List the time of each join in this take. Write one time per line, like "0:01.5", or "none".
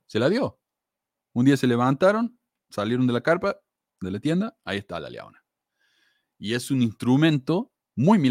none